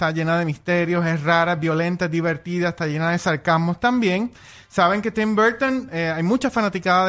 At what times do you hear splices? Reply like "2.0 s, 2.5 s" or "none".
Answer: none